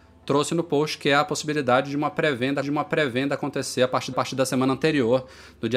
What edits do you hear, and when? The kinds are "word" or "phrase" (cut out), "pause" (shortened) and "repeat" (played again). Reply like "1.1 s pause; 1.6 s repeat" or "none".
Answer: 2.6 s repeat; 4.1 s repeat